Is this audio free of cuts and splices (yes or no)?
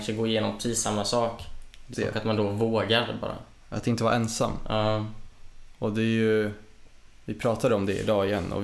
no